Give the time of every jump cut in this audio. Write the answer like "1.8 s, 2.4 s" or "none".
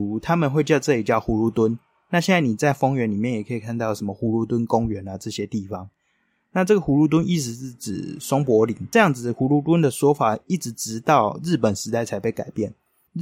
none